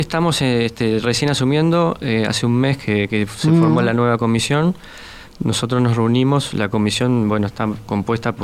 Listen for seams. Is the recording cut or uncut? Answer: uncut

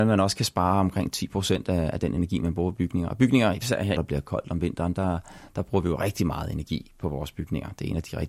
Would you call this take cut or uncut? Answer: cut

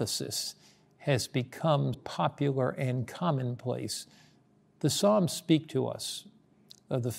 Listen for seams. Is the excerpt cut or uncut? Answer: cut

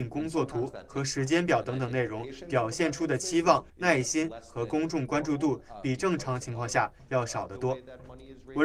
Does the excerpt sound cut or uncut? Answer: cut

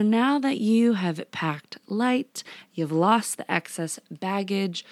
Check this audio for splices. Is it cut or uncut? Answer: uncut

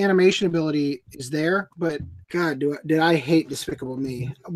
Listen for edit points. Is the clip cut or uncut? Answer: cut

